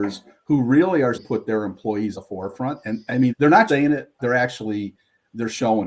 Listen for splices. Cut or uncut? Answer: cut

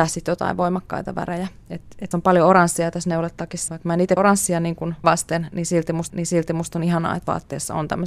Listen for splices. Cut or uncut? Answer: cut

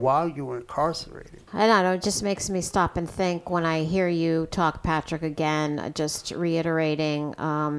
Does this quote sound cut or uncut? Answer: cut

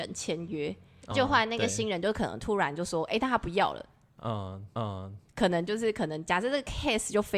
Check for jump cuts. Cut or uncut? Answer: cut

